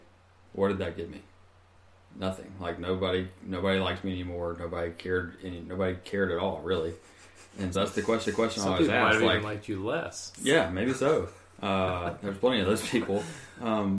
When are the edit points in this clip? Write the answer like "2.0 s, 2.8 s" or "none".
7.7 s, 8.2 s